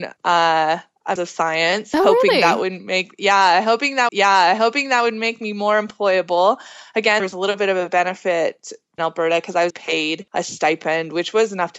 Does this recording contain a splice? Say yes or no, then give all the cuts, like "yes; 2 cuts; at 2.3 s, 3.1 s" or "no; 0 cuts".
yes; 6 cuts; at 1.2 s, 4.1 s, 7.2 s, 9.0 s, 9.7 s, 10.3 s